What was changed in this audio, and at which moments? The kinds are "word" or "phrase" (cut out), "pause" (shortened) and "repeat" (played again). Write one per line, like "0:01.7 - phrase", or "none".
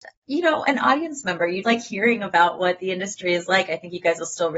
0:01.6 - word